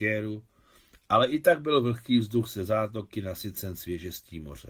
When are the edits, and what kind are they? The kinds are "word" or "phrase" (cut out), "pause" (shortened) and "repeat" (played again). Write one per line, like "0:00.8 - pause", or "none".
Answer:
none